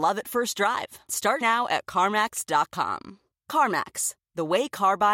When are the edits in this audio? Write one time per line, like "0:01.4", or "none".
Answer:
0:01.1
0:01.4